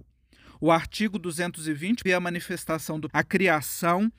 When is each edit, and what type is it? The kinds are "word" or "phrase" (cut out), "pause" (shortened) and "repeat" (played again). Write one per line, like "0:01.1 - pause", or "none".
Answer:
0:02.1 - word
0:03.1 - word